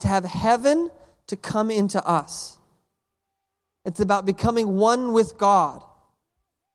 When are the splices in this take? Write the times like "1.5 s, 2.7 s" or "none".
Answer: none